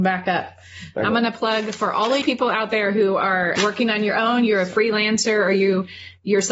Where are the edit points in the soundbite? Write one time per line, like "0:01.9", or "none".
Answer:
0:02.2
0:03.6